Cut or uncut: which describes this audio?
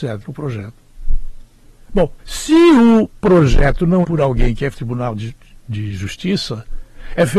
cut